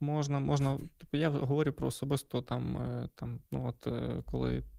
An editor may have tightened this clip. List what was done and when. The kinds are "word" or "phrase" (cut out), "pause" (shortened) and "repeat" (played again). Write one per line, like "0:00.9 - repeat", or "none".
0:03.5 - pause

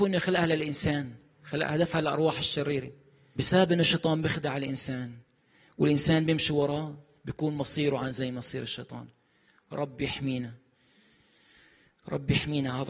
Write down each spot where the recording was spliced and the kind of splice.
0:03.4 - word

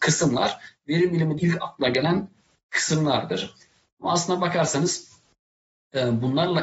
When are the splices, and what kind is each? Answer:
0:01.4 - word

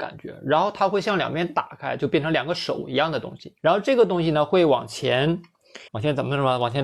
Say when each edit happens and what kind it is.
0:03.6 - pause
0:05.9 - pause

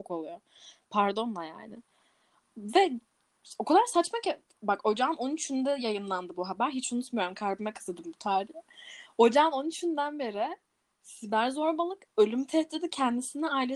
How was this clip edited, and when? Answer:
none

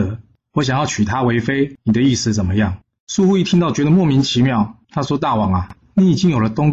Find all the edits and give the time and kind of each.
0:02.8 - pause
0:04.8 - pause

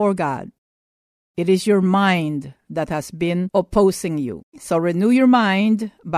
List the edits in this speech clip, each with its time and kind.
0:04.5 - pause

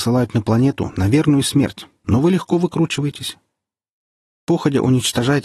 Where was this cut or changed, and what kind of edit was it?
none

